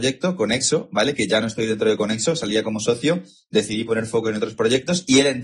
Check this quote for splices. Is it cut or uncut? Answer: uncut